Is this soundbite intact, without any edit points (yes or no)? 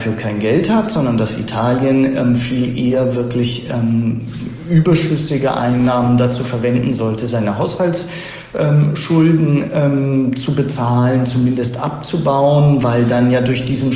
yes